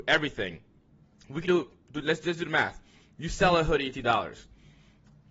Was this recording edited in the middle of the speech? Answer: yes; 2 cuts; at 1.5 s, 3.9 s

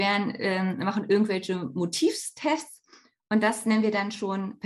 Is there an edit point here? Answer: no; 0 cuts

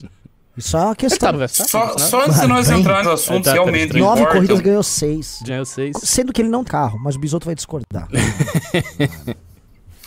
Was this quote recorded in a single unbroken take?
no; 5 cuts; at 1.3 s, 3.0 s, 3.5 s, 5.5 s, 6.7 s

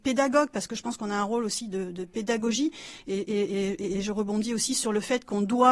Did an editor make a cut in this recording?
no; 0 cuts

